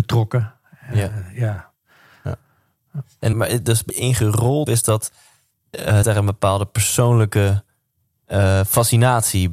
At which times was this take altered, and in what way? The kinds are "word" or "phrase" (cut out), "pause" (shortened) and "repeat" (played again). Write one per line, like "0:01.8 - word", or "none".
0:03.3 - word
0:03.9 - phrase
0:04.7 - word
0:06.0 - word